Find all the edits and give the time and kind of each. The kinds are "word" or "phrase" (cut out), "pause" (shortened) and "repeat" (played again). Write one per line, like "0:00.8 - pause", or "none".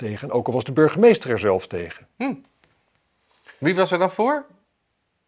none